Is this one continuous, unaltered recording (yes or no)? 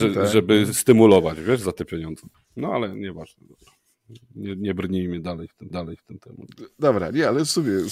no